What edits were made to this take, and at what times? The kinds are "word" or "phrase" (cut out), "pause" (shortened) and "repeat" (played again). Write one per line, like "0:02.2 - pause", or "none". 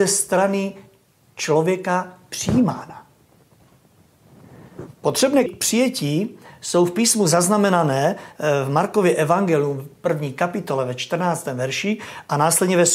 0:05.5 - word